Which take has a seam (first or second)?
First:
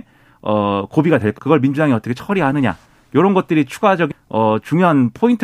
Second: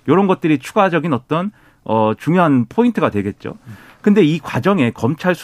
first